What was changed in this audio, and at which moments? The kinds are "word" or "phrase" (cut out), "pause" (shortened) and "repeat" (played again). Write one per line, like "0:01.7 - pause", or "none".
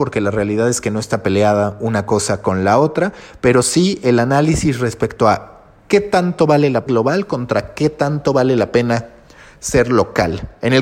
0:06.9 - phrase